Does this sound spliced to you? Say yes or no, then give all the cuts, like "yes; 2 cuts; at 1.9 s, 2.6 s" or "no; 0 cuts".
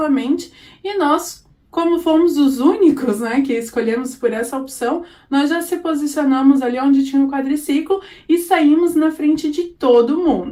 no; 0 cuts